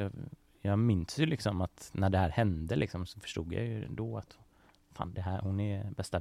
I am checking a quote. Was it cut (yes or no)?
no